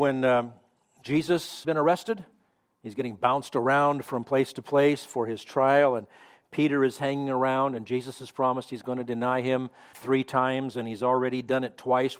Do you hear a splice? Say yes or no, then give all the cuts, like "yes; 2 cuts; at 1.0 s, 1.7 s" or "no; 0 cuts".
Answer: yes; 2 cuts; at 1.6 s, 9.9 s